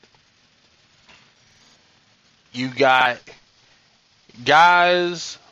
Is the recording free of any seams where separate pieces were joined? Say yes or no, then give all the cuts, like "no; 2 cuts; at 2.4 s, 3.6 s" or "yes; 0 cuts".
yes; 0 cuts